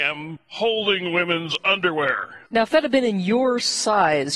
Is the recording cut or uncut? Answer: cut